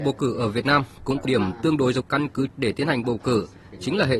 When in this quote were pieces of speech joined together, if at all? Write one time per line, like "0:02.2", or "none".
0:01.3
0:02.0
0:02.5